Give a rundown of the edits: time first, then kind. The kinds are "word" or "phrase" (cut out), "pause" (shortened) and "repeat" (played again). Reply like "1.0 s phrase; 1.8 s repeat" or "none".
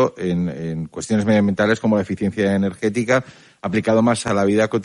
none